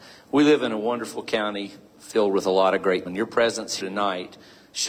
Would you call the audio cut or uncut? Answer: cut